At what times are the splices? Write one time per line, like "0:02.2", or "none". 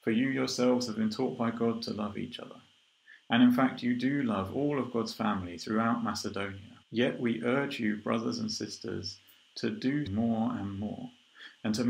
0:06.8
0:10.1

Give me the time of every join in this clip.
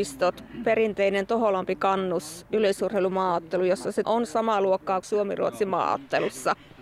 0:04.0
0:05.0

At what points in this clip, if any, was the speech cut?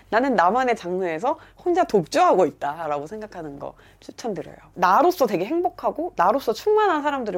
none

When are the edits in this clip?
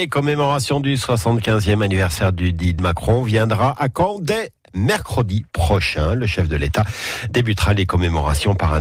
0:02.8

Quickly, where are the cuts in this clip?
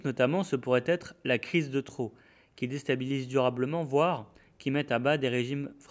none

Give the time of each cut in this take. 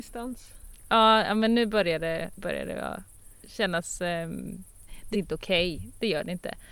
0:02.4
0:05.1

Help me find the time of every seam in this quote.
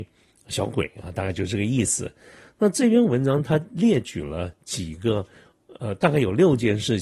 none

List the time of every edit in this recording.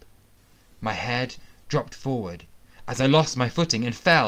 none

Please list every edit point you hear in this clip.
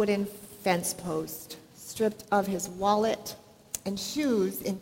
none

